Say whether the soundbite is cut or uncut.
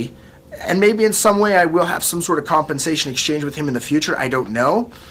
uncut